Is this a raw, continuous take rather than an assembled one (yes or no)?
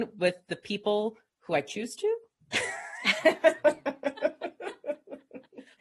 yes